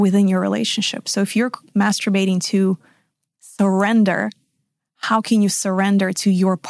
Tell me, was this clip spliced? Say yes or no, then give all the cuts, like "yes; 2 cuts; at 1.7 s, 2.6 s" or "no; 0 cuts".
no; 0 cuts